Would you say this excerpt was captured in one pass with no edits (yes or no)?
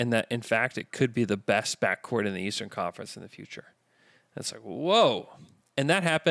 yes